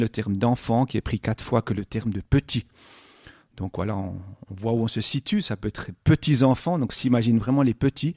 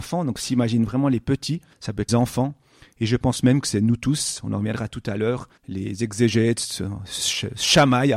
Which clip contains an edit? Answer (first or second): second